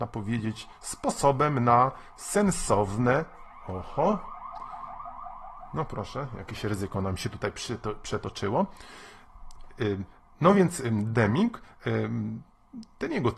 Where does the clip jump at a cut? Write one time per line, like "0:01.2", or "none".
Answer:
none